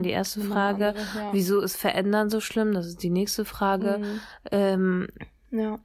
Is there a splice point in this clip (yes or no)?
no